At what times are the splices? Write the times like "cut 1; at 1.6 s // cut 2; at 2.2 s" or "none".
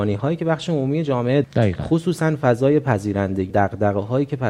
cut 1; at 1.4 s // cut 2; at 3.5 s